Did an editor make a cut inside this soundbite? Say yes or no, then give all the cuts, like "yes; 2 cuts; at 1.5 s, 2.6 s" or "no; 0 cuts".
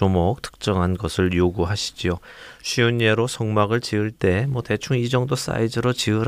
no; 0 cuts